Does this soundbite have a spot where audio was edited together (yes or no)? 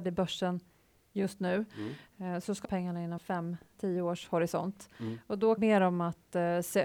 yes